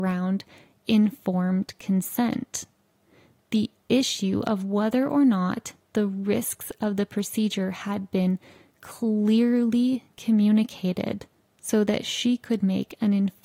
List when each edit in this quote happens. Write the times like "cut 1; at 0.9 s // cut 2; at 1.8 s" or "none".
none